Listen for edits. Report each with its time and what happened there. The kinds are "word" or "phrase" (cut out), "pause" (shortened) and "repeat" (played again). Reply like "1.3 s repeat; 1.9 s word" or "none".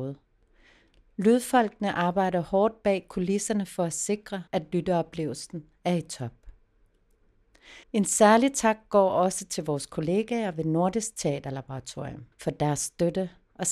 4.5 s pause; 7.8 s pause; 12.3 s pause